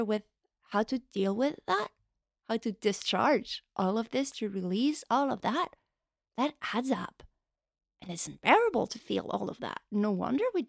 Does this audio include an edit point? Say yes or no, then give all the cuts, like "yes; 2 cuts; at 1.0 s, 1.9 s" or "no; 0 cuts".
no; 0 cuts